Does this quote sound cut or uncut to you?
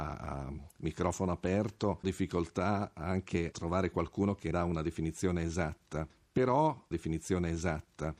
cut